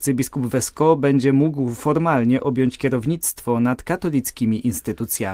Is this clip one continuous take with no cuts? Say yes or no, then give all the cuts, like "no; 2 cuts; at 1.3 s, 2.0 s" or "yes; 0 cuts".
yes; 0 cuts